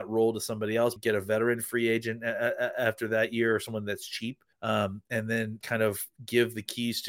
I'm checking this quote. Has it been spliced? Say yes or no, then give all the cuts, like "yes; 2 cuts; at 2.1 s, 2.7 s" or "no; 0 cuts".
yes; 3 cuts; at 1.0 s, 4.5 s, 5.6 s